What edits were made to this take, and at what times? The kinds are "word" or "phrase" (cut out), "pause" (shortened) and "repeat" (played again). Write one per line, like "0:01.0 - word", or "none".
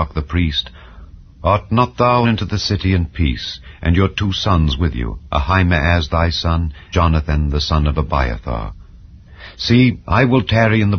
0:02.2 - phrase
0:06.9 - word